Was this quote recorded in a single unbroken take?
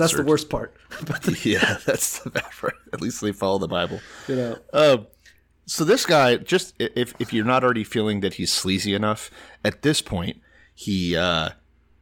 yes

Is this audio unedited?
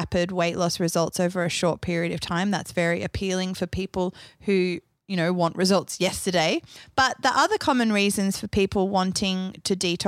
yes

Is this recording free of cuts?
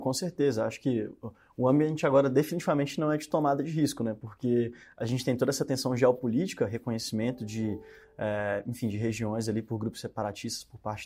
yes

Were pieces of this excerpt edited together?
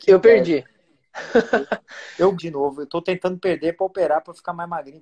yes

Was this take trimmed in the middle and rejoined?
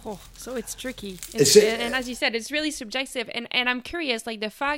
no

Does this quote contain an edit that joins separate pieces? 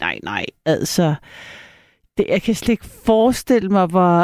no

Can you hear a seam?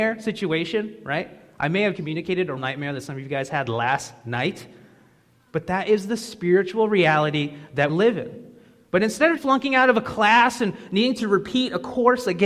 yes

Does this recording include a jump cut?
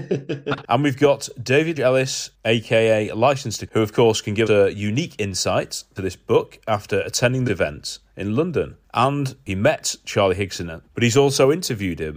yes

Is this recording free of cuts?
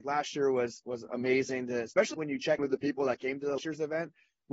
no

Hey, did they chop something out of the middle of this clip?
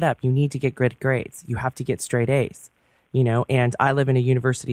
no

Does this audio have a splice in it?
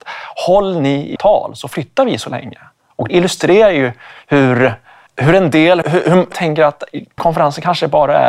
yes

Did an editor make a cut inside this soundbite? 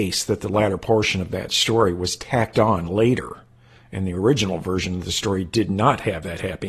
no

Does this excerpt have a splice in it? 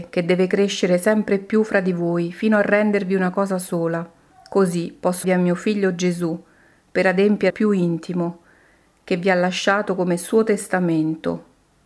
yes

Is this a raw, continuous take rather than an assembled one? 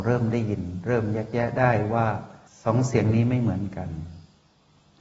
yes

